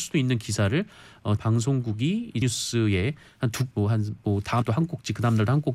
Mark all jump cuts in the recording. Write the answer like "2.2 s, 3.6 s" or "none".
1.4 s, 2.4 s, 3.7 s, 4.6 s